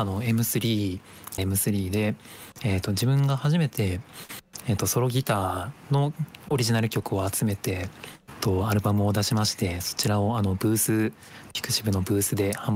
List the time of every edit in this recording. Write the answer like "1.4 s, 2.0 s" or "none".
1.4 s, 8.2 s